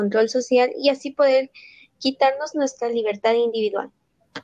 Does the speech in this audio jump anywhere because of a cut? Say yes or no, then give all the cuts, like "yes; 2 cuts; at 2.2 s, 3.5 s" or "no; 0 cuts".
no; 0 cuts